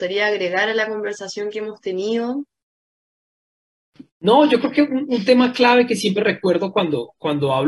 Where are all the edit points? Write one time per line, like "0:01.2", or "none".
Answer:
0:04.1